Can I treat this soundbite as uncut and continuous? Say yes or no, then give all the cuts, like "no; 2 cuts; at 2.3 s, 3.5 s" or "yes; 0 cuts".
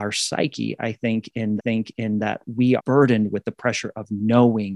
no; 2 cuts; at 1.6 s, 2.8 s